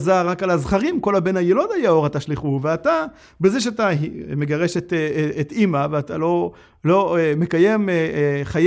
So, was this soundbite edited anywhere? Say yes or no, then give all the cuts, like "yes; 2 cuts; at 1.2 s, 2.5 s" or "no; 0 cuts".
no; 0 cuts